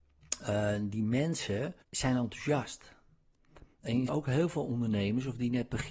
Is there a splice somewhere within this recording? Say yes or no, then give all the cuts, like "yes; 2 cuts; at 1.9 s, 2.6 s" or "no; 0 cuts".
yes; 2 cuts; at 1.8 s, 4.1 s